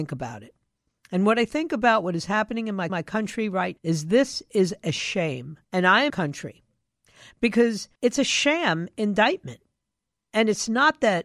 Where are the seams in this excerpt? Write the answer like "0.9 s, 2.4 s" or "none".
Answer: 2.9 s, 3.8 s, 5.6 s, 6.1 s, 8.0 s